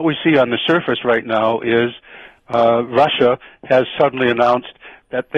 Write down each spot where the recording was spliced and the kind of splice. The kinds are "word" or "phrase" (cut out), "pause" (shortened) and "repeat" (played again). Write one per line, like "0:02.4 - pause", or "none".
none